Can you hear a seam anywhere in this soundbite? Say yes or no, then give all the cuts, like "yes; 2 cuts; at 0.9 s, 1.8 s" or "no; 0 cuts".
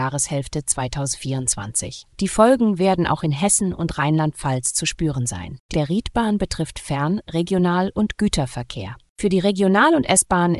yes; 2 cuts; at 2.1 s, 5.7 s